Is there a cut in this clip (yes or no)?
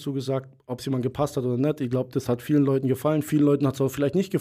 no